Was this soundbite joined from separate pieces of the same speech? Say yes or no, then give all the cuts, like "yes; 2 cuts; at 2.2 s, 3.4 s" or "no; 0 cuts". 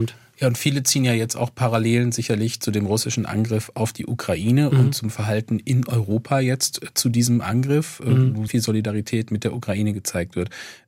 yes; 1 cut; at 8.5 s